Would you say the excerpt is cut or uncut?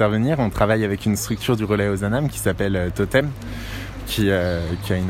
uncut